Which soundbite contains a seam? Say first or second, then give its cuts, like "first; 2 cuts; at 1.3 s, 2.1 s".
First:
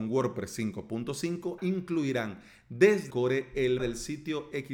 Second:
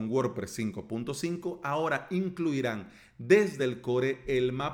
first; 3 cuts; at 1.6 s, 3.1 s, 3.8 s